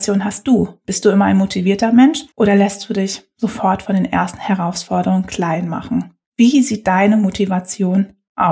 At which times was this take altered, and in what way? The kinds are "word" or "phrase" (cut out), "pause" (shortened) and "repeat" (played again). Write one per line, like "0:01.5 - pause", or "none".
0:02.3 - pause
0:06.2 - pause